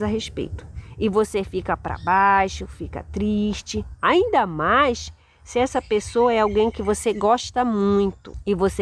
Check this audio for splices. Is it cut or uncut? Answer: uncut